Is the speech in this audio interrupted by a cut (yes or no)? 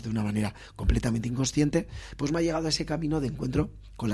no